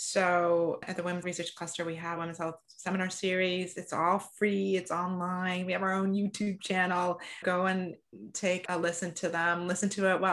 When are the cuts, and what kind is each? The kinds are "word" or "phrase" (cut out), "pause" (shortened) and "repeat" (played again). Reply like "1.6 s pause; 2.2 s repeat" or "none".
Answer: 1.2 s word; 2.2 s word